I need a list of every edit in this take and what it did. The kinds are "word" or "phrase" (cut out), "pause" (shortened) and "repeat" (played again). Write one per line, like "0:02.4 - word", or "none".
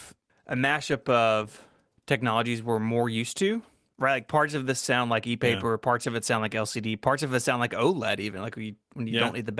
none